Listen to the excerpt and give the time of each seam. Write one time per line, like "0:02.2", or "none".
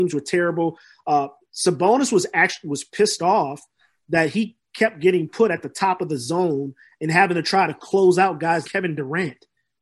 0:08.6